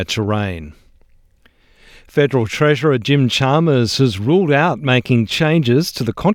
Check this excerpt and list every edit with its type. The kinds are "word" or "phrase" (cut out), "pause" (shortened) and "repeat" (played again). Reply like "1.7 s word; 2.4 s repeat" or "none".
none

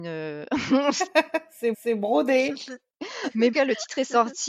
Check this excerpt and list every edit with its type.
1.7 s repeat; 3.5 s phrase

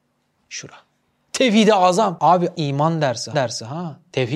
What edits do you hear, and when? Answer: 2.5 s phrase; 3.3 s repeat

